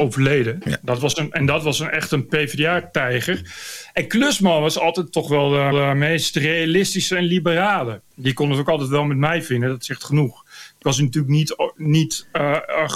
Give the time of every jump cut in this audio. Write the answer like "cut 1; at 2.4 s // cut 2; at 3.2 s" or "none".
cut 1; at 5.7 s // cut 2; at 8.1 s